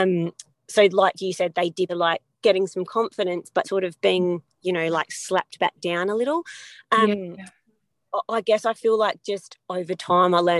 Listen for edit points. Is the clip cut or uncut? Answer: cut